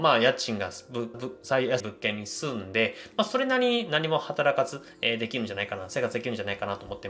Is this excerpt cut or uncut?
cut